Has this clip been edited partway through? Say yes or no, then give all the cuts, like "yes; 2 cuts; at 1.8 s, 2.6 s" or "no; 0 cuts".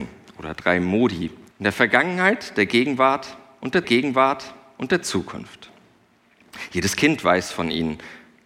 yes; 2 cuts; at 1.5 s, 3.8 s